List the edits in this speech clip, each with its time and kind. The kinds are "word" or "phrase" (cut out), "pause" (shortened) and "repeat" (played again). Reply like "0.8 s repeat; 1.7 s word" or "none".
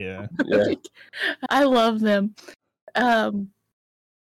1.5 s word